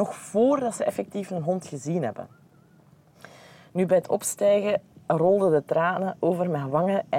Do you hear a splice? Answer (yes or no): no